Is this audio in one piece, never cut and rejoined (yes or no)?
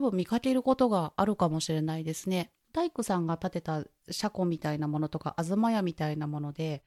no